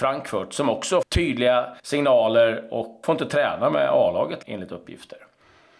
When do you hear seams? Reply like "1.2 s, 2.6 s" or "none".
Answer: 1.0 s, 1.8 s, 3.0 s, 4.4 s